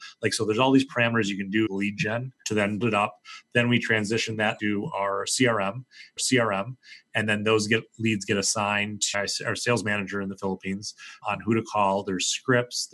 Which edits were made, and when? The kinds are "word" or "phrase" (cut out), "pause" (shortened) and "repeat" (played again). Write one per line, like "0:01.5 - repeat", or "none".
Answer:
0:01.7 - word
0:02.4 - word
0:02.8 - word
0:04.6 - word
0:06.2 - repeat
0:09.1 - phrase
0:11.2 - word